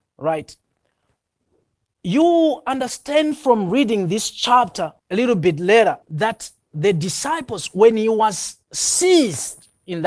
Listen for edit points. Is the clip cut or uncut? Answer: cut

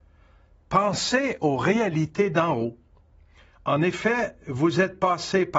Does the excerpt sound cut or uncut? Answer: uncut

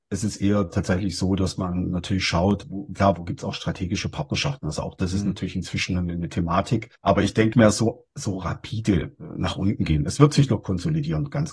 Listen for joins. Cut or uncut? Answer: cut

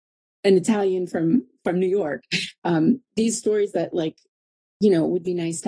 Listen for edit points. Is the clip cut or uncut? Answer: uncut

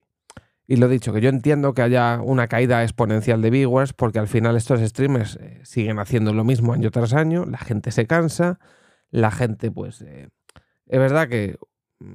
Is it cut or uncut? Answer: uncut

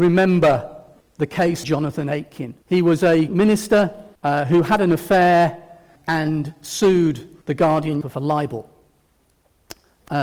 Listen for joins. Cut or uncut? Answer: cut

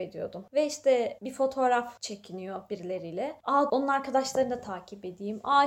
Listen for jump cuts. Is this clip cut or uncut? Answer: cut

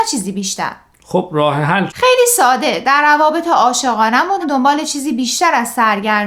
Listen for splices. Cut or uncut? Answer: cut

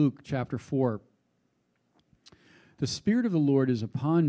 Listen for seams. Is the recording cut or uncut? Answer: uncut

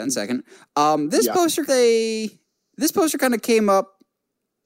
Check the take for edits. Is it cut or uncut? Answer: cut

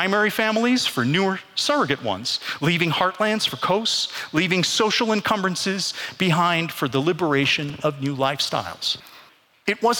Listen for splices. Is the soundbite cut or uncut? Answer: uncut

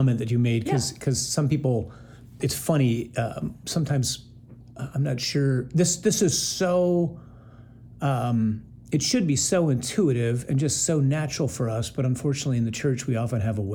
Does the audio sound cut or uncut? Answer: cut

